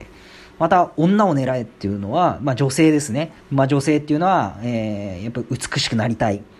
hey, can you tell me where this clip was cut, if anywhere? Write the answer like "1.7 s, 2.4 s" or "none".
3.4 s